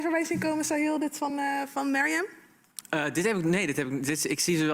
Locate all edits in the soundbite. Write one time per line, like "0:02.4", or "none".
none